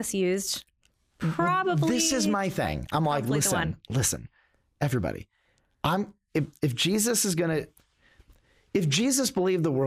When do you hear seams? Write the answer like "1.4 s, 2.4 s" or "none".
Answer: none